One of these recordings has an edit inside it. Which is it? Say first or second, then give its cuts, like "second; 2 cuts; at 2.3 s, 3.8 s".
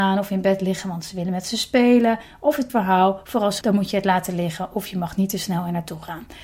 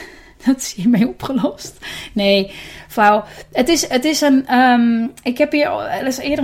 first; 2 cuts; at 2.7 s, 3.6 s